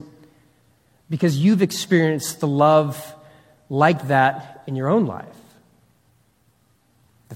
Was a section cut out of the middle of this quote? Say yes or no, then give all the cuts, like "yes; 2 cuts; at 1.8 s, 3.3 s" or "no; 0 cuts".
no; 0 cuts